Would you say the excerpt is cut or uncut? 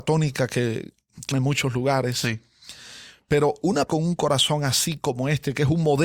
cut